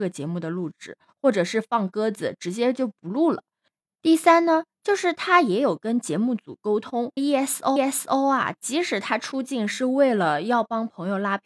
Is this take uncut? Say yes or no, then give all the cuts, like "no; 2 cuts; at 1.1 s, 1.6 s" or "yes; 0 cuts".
no; 2 cuts; at 7.2 s, 7.8 s